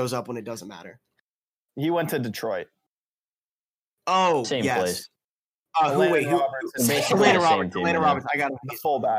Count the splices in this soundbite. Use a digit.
0